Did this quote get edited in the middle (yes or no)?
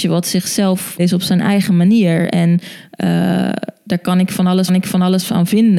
yes